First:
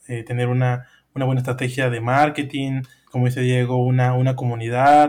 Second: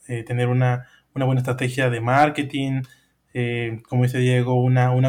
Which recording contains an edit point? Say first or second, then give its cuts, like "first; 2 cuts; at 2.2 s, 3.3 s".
first; 1 cut; at 3.1 s